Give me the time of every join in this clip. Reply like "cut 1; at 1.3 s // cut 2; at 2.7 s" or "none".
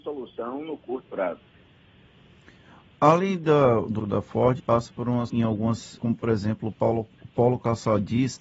cut 1; at 1.1 s // cut 2; at 4.0 s // cut 3; at 4.6 s // cut 4; at 5.3 s // cut 5; at 6.0 s